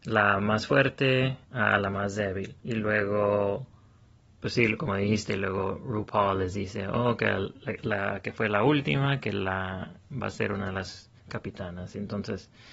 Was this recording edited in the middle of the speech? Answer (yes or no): yes